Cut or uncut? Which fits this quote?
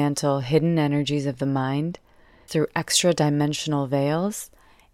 cut